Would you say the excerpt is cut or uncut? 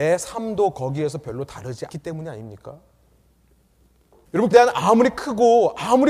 cut